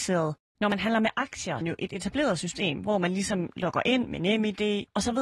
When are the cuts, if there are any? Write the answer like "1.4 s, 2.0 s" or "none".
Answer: 1.6 s